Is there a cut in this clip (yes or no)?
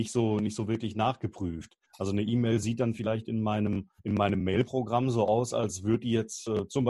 yes